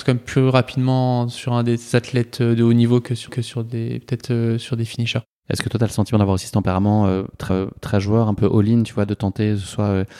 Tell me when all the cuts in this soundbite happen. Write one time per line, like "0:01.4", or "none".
0:03.3
0:07.5